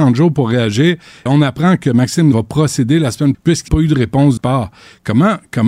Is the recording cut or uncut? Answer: cut